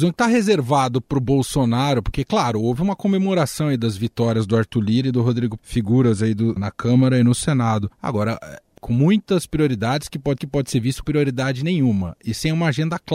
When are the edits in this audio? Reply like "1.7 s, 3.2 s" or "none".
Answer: 5.6 s, 6.6 s, 7.9 s, 8.8 s, 10.4 s, 11.0 s

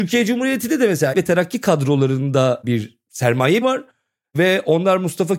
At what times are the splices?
1.1 s, 3.6 s

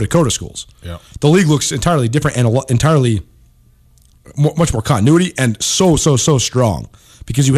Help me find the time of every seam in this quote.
none

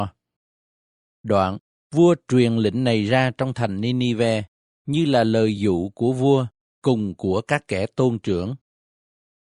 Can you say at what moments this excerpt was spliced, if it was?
none

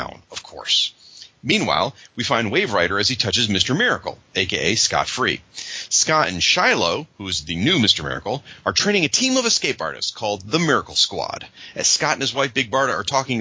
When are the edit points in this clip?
none

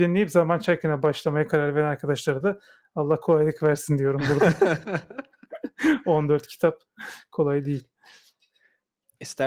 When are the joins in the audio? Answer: none

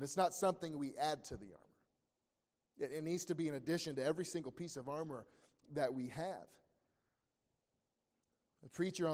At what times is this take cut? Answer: none

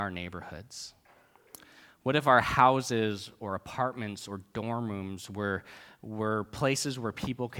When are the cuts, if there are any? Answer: none

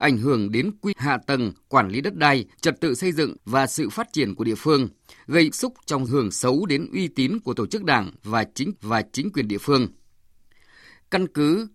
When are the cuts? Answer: 0.9 s, 2.5 s, 3.4 s, 5.5 s, 6.1 s, 8.7 s

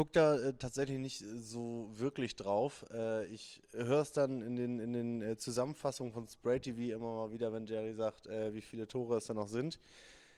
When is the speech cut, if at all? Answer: none

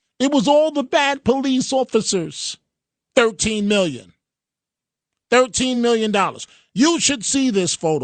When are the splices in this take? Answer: none

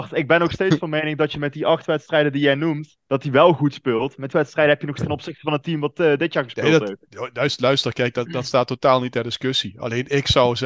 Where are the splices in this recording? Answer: 3.0 s, 4.3 s, 5.0 s

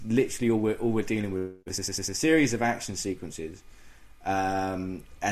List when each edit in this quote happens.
1.6 s

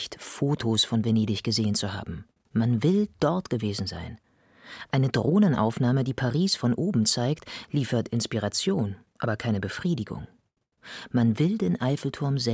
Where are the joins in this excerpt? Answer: none

